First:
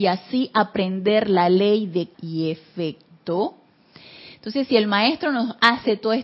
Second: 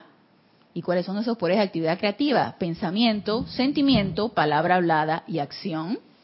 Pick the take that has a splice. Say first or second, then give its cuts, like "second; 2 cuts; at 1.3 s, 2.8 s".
first; 1 cut; at 2.1 s